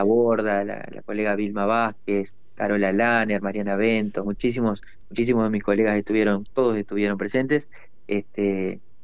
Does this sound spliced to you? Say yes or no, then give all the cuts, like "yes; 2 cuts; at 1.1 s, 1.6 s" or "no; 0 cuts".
yes; 2 cuts; at 4.2 s, 6.5 s